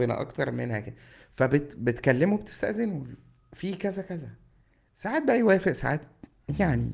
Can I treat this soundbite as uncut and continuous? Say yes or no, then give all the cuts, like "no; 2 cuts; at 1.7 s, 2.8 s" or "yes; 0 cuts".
yes; 0 cuts